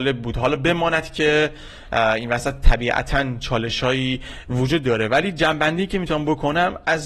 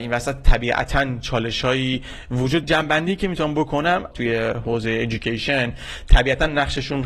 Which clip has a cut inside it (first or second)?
second